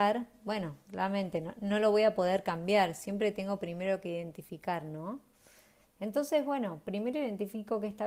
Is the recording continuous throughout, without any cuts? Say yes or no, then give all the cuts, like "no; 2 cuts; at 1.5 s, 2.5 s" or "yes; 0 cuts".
yes; 0 cuts